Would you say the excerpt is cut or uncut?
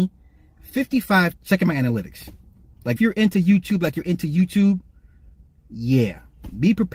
cut